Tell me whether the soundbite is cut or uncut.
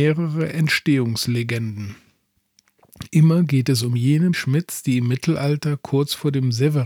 cut